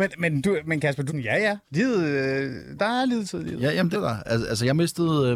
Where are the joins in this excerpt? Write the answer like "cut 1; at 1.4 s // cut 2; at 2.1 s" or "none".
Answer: cut 1; at 1.1 s // cut 2; at 1.6 s // cut 3; at 2.8 s // cut 4; at 3.9 s